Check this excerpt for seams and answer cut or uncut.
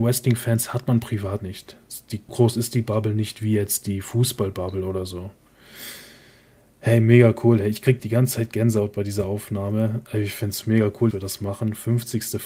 cut